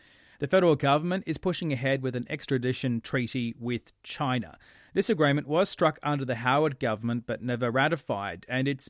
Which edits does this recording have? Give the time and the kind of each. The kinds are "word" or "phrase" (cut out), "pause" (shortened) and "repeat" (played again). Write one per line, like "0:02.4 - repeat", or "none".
none